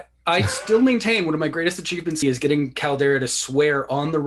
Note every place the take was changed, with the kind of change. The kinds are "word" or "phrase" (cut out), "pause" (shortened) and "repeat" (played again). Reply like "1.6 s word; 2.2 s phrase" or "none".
2.2 s phrase